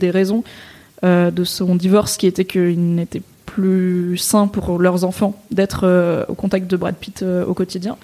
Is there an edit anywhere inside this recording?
no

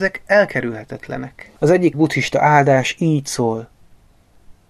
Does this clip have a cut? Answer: yes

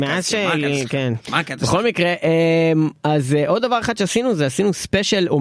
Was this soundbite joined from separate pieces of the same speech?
no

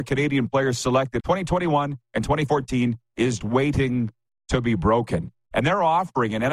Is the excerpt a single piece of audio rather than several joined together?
no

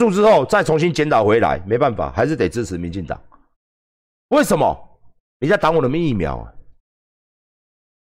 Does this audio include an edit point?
no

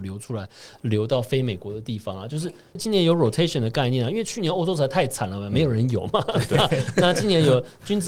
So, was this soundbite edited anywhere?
no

